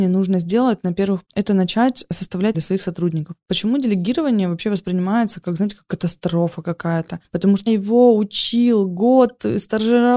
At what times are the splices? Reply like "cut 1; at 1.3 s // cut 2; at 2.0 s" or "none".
cut 1; at 1.2 s // cut 2; at 2.5 s // cut 3; at 7.7 s